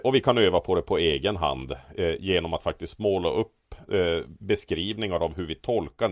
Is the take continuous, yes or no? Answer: yes